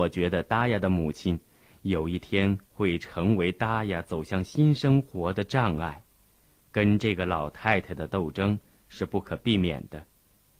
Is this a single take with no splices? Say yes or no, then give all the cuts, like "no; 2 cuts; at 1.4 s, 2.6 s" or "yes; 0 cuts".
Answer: yes; 0 cuts